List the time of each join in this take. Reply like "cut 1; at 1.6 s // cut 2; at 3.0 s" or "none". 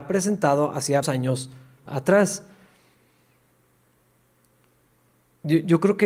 cut 1; at 1.0 s // cut 2; at 1.9 s